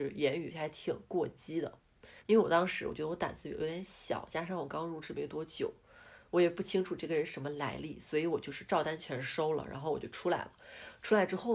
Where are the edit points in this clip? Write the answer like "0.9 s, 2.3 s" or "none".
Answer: 2.2 s